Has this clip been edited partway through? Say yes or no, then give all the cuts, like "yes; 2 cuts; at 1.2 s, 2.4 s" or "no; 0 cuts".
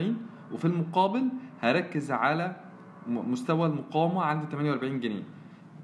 no; 0 cuts